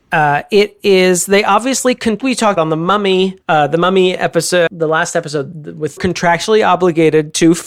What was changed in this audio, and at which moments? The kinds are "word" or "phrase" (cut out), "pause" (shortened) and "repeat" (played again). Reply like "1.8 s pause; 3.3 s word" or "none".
2.2 s phrase; 2.6 s word; 3.4 s pause; 4.7 s word; 5.5 s word; 6.0 s phrase